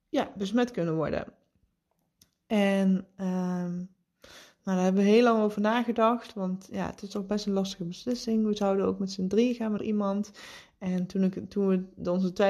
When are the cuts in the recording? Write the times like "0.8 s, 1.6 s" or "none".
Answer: 9.8 s